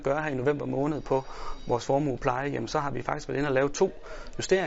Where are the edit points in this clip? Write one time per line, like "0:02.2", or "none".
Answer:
none